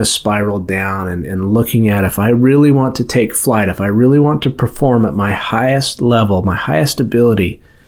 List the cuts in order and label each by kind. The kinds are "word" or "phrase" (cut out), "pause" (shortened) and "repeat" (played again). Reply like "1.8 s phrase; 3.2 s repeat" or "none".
none